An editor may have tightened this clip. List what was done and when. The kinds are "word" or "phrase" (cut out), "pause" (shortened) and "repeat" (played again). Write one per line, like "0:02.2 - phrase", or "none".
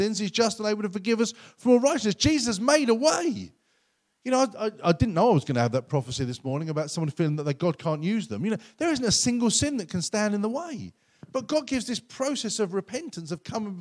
none